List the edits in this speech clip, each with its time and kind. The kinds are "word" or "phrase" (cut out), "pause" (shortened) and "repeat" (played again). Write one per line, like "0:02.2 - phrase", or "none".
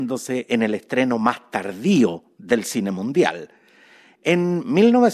none